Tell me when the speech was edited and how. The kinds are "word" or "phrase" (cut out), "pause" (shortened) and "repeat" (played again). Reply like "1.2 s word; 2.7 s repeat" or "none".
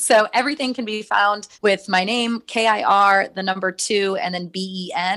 1.5 s pause